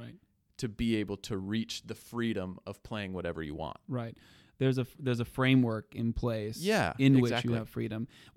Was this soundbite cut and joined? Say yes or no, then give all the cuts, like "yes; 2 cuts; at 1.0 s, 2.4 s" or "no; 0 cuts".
no; 0 cuts